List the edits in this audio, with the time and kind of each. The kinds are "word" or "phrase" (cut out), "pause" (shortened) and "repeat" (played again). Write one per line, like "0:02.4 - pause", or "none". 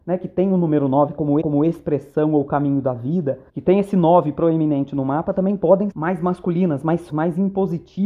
0:01.4 - repeat
0:03.5 - pause
0:05.9 - word
0:07.1 - word